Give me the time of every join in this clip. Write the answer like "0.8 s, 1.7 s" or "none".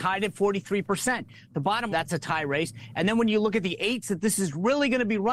1.9 s, 4.0 s